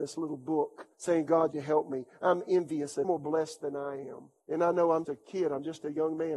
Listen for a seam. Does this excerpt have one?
yes; 5 cuts; at 0.9 s, 1.5 s, 3.0 s, 4.4 s, 5.0 s

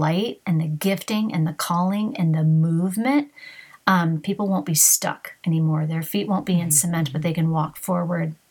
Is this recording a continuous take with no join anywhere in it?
yes; 0 cuts

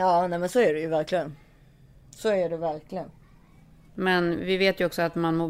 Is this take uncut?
yes; 0 cuts

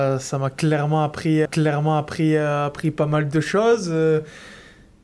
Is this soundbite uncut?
no; 1 cut; at 1.5 s

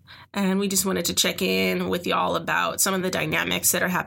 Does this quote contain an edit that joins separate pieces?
no; 0 cuts

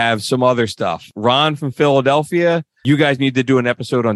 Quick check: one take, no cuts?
yes; 0 cuts

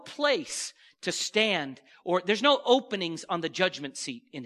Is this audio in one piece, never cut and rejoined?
yes; 0 cuts

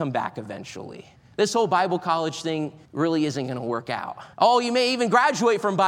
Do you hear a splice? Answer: yes; 3 cuts; at 1.2 s, 2.8 s, 4.3 s

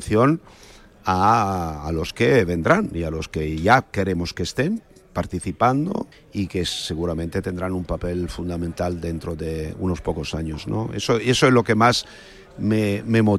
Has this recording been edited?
yes; 1 cut; at 6.1 s

